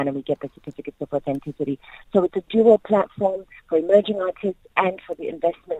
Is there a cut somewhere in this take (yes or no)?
no